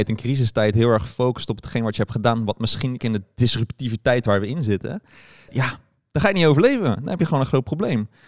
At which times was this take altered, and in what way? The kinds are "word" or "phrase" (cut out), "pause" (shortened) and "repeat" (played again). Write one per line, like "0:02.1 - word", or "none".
0:03.0 - phrase
0:05.5 - word